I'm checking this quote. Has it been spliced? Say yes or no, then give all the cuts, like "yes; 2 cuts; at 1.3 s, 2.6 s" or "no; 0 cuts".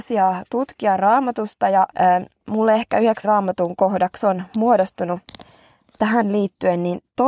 yes; 2 cuts; at 1.9 s, 3.2 s